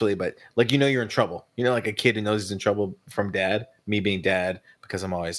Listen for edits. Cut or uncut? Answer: uncut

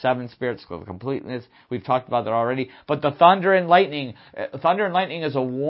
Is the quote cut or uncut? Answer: uncut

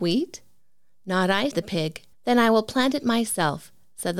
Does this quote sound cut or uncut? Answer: cut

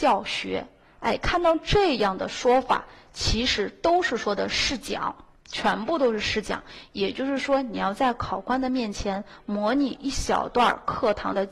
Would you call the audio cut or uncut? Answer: cut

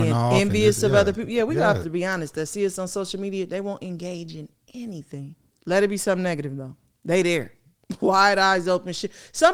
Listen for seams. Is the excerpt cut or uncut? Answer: cut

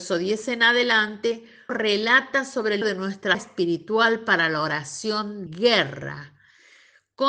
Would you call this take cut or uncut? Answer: cut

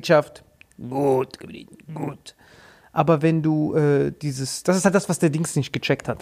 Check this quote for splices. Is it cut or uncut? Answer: uncut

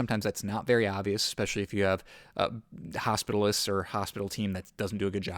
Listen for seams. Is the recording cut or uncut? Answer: uncut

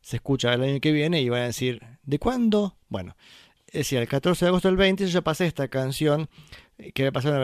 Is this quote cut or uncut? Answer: uncut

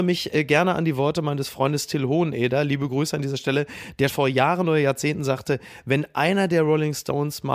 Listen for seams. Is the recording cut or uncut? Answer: cut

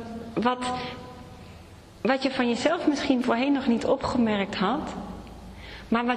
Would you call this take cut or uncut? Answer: uncut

